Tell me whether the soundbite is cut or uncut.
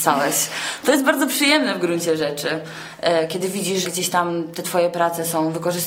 cut